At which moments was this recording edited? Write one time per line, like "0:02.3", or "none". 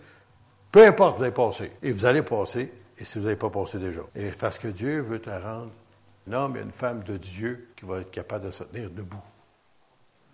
0:01.8
0:04.1
0:06.3
0:07.7